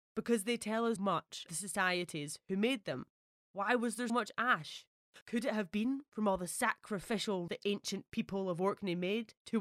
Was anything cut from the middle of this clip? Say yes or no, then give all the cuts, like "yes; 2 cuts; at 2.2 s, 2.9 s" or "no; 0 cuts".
yes; 4 cuts; at 1.0 s, 1.5 s, 4.1 s, 7.5 s